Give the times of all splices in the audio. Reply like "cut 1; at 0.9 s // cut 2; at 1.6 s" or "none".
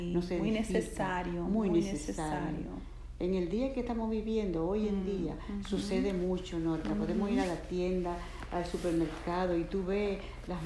none